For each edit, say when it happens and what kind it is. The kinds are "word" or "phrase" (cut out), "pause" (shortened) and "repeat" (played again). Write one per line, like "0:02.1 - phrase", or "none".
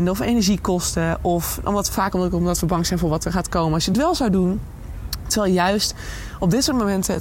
none